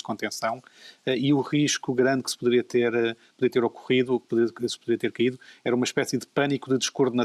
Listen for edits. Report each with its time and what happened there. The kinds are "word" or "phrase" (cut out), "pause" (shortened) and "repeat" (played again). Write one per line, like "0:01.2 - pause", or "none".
none